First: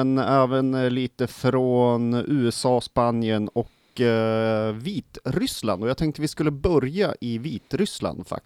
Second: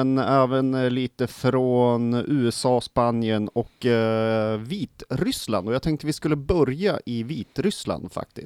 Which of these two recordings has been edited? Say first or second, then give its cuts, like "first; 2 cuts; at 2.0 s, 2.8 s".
second; 1 cut; at 3.7 s